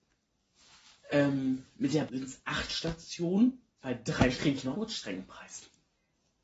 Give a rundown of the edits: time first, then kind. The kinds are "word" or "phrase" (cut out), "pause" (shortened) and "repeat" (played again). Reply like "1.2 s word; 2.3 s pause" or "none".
2.1 s word; 4.3 s word; 4.7 s word